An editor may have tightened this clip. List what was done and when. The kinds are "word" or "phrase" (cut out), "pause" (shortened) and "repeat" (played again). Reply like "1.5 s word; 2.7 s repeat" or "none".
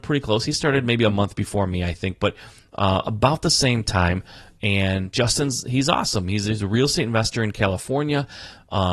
none